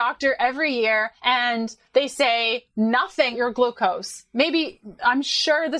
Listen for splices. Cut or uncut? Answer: cut